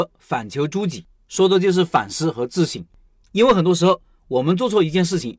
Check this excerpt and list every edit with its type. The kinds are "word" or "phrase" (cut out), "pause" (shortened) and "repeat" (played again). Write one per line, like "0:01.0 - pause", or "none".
none